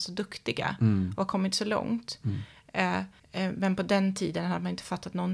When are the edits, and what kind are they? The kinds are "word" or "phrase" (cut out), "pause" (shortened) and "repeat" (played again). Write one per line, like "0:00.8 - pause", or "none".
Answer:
0:03.2 - pause